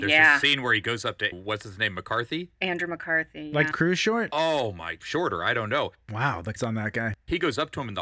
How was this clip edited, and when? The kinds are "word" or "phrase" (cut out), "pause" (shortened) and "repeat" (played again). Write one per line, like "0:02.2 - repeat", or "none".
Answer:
0:01.3 - word
0:03.7 - word
0:05.0 - word
0:06.6 - word

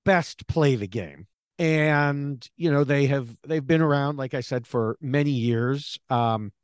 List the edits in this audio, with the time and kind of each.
0:01.3 - pause

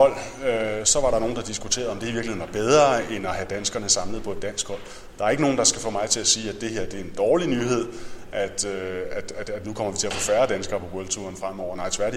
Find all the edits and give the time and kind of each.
none

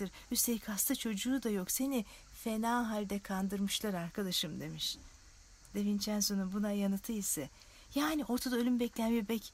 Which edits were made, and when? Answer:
none

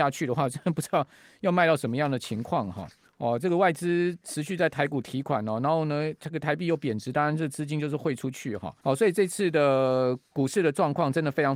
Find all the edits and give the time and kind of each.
0:03.0 - pause
0:08.8 - pause
0:10.3 - pause

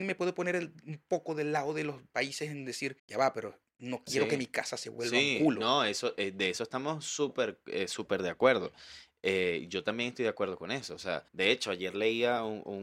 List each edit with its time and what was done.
0:03.0 - pause
0:11.3 - pause

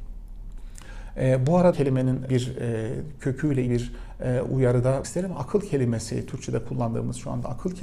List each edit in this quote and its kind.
0:01.7 - word
0:02.3 - word
0:03.7 - word
0:05.0 - word

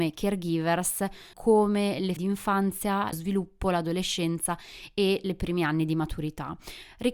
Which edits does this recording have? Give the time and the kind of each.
0:01.3 - phrase
0:02.2 - word
0:03.1 - word

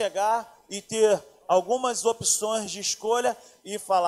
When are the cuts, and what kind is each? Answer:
none

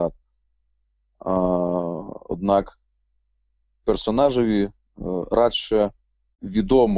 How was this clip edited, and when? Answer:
none

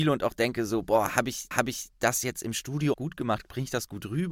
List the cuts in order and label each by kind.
0:01.5 - repeat
0:02.9 - word

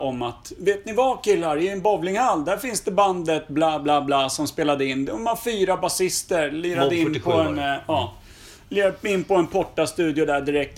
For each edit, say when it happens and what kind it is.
none

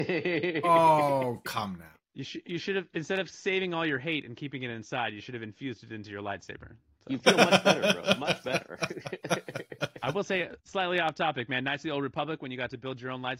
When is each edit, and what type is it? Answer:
none

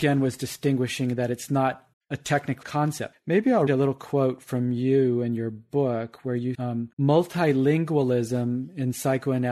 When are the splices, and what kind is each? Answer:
0:01.9 - pause
0:02.6 - word
0:03.1 - word
0:03.7 - word
0:06.5 - word
0:06.9 - pause

